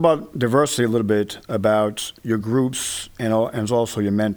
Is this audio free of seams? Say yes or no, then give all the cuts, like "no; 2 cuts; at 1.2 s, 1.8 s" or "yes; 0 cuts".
yes; 0 cuts